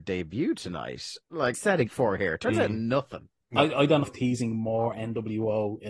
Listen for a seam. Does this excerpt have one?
yes; 3 cuts; at 1.5 s, 1.9 s, 4.0 s

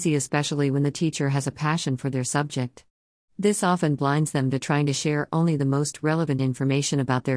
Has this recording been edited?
no; 0 cuts

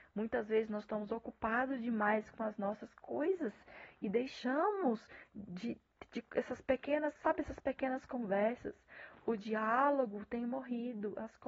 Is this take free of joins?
yes; 0 cuts

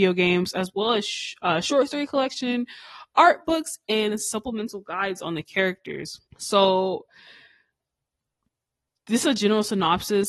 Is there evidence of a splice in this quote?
yes; 1 cut; at 6.3 s

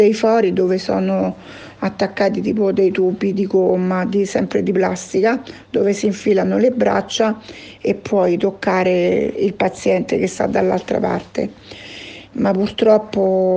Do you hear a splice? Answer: no; 0 cuts

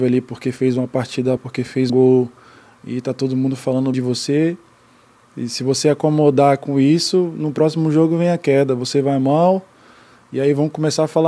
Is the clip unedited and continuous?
no; 3 cuts; at 1.4 s, 1.9 s, 3.9 s

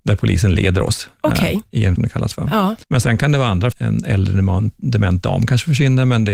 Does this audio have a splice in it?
yes; 3 cuts; at 2.0 s, 2.8 s, 3.7 s

